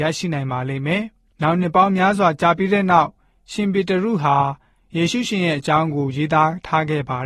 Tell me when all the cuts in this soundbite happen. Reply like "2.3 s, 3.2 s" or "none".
none